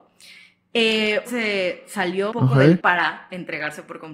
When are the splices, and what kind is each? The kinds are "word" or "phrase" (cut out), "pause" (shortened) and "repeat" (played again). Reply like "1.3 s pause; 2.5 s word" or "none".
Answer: 1.3 s word; 2.3 s word; 2.8 s word